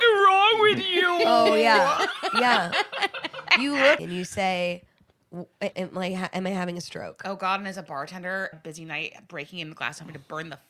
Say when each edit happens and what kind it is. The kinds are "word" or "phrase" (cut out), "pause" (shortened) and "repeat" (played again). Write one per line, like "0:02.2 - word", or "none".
0:04.0 - word
0:05.7 - word
0:08.5 - word